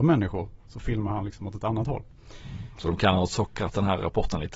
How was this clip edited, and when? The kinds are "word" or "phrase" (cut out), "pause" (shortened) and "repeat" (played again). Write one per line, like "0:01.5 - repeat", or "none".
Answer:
none